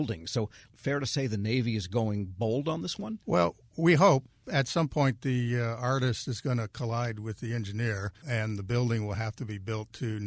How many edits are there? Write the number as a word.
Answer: two